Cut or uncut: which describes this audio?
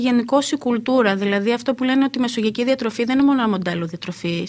uncut